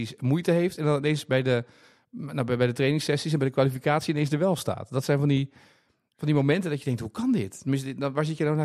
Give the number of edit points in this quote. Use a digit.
0